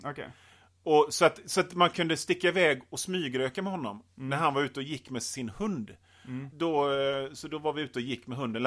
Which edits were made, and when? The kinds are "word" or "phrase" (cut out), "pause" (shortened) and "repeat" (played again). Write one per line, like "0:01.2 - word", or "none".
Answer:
none